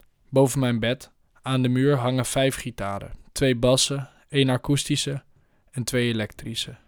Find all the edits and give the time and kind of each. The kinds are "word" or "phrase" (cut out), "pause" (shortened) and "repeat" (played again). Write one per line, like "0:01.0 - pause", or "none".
0:03.2 - pause